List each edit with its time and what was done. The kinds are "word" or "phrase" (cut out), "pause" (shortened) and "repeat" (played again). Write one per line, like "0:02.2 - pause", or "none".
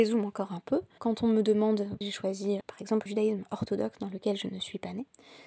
0:01.0 - word
0:02.0 - word
0:02.6 - word
0:03.1 - word

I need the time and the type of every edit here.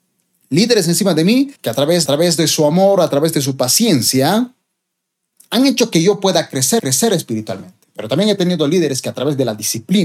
0:01.6 - pause
0:02.1 - repeat
0:06.8 - repeat

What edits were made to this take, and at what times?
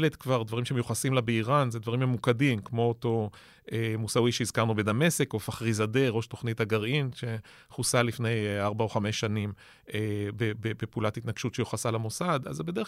none

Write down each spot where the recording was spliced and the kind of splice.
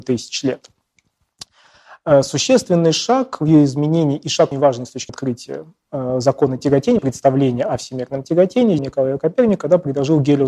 0:04.5 - word
0:05.1 - word
0:07.0 - word
0:08.8 - word

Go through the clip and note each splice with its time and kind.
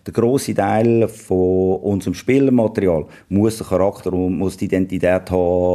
none

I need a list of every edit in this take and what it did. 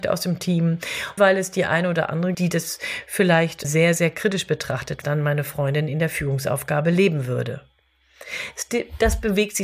0:01.2 - word
0:02.3 - word
0:03.6 - word
0:05.0 - word

